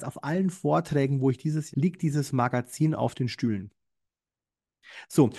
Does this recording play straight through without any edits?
no; 1 cut; at 1.7 s

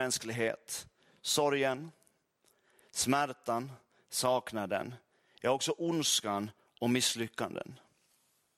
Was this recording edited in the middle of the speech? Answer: no; 0 cuts

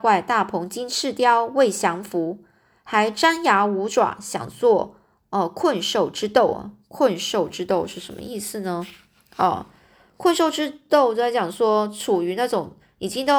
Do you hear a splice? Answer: no; 0 cuts

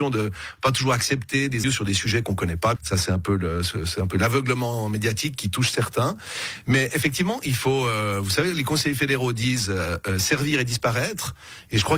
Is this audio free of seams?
no; 2 cuts; at 1.6 s, 2.8 s

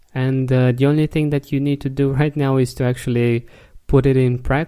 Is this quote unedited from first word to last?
yes; 0 cuts

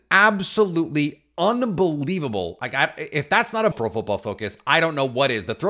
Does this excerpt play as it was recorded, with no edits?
no; 1 cut; at 3.7 s

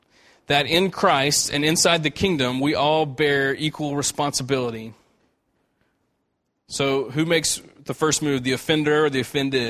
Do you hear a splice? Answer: no; 0 cuts

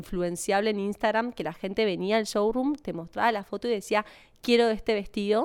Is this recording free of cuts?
yes; 0 cuts

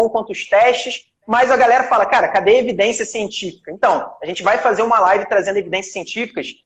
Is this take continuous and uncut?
yes; 0 cuts

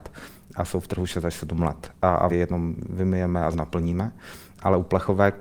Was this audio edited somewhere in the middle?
yes; 2 cuts; at 2.3 s, 3.5 s

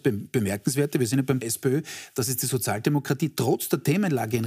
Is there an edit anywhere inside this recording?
yes; 1 cut; at 1.4 s

